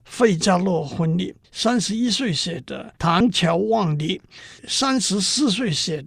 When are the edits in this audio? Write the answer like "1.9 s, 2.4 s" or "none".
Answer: 1.4 s